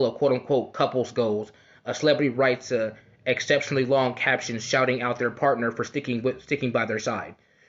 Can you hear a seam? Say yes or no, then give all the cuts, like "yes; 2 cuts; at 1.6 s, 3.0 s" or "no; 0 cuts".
no; 0 cuts